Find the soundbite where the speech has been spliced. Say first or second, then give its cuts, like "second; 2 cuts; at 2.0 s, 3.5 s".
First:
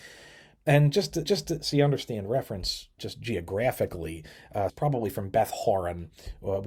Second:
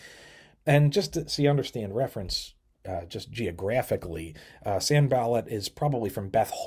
first; 3 cuts; at 1.3 s, 3.0 s, 4.7 s